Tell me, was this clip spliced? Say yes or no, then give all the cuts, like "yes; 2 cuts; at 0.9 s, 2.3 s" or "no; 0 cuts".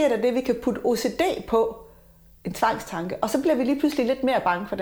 no; 0 cuts